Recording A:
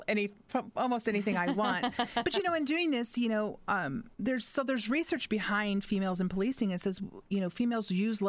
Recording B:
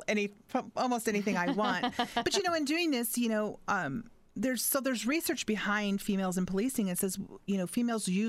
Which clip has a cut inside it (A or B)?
A